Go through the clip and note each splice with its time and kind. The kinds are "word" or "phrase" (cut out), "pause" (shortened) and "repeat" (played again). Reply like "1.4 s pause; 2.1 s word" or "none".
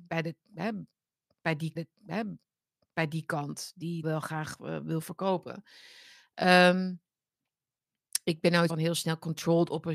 1.8 s repeat; 4.0 s word; 8.7 s phrase